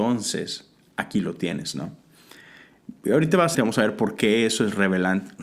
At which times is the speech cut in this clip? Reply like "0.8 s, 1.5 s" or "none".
3.5 s